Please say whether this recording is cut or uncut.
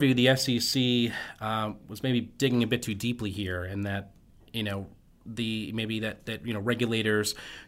uncut